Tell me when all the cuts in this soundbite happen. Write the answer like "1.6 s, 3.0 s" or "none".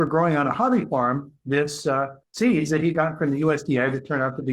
2.2 s